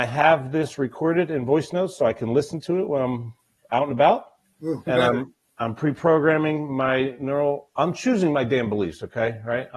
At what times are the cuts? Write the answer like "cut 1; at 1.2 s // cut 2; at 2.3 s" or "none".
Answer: cut 1; at 4.9 s